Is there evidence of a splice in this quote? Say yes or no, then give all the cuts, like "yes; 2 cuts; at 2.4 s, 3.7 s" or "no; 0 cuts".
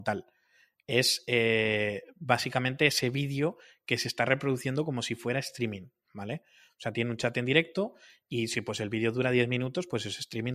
no; 0 cuts